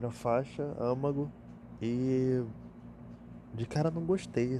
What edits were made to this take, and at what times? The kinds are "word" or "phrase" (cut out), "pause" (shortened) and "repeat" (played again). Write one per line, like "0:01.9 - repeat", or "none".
none

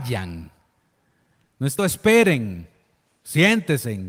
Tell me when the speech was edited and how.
0:01.8 - word

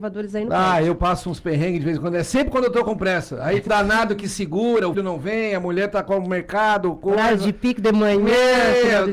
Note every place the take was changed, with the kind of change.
0:03.7 - word
0:04.9 - word

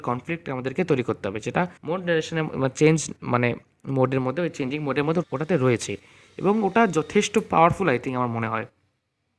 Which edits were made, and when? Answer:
0:01.8 - pause
0:05.2 - word

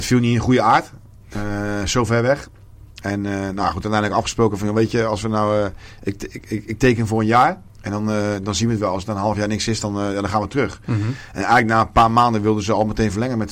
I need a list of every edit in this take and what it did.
0:07.7 - pause

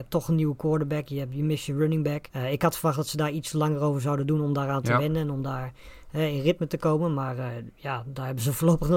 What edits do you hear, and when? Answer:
0:02.3 - pause

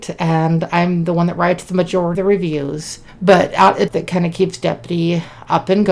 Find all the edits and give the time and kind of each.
0:02.1 - word
0:03.9 - phrase

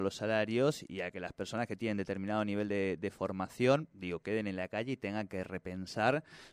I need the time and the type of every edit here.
none

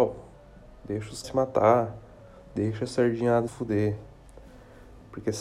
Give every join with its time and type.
0:01.2 - word
0:03.5 - word

